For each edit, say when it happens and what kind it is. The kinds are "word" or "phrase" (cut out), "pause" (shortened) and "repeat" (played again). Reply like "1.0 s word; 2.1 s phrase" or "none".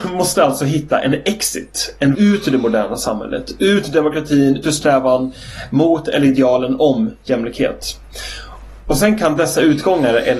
2.1 s word; 4.6 s word